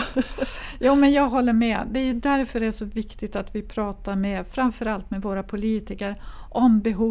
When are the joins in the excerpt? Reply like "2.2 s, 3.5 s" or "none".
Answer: none